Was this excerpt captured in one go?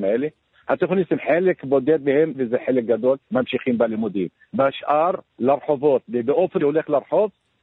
no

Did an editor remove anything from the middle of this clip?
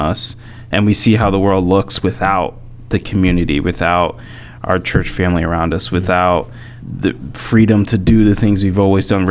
yes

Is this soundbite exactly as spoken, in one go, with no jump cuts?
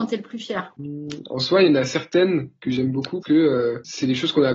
no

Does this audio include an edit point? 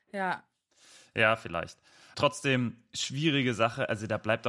yes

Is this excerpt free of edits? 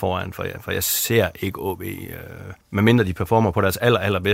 no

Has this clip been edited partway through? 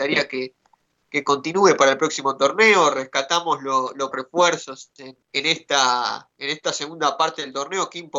yes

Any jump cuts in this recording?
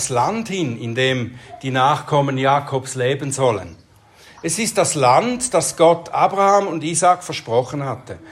no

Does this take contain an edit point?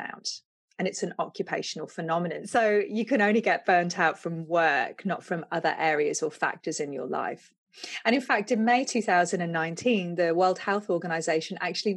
no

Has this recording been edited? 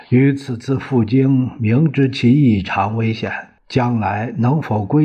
yes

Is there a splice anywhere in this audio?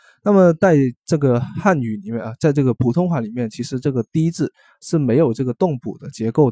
no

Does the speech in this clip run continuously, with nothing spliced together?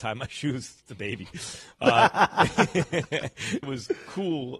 no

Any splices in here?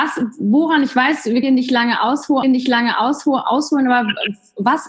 yes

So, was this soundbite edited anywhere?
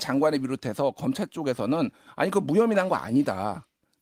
no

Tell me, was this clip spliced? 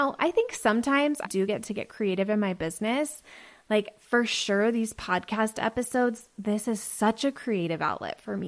yes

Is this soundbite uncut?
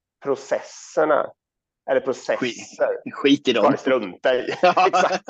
yes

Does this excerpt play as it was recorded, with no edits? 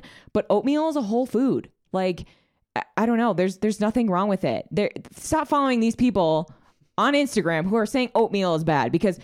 yes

